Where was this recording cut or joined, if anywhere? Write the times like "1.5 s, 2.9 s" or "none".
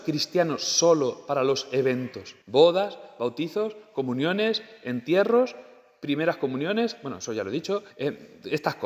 2.4 s, 7.9 s